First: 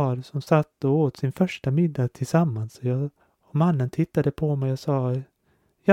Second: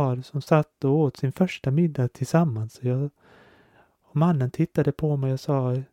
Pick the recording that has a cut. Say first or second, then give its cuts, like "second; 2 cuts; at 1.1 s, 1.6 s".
first; 1 cut; at 3.2 s